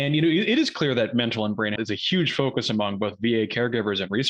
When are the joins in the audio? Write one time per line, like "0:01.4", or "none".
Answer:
0:01.8

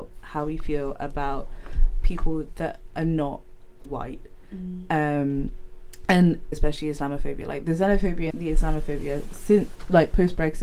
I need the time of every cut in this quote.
0:02.0
0:03.9
0:06.5
0:08.3

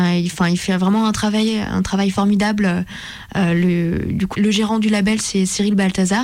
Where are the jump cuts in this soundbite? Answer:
0:04.3

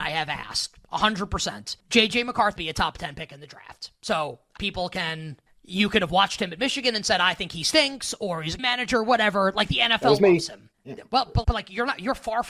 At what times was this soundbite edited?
0:01.8
0:02.6
0:04.6
0:05.5
0:08.6
0:10.7
0:11.4

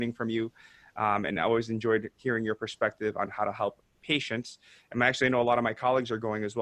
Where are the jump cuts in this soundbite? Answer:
none

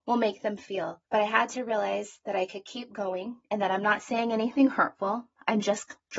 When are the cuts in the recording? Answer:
0:01.1
0:03.4

